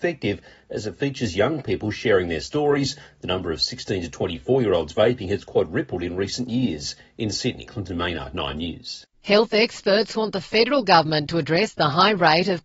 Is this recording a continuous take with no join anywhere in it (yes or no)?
yes